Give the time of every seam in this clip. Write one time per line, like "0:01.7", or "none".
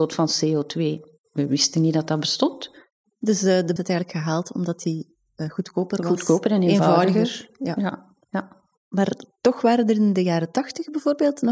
0:03.8
0:08.2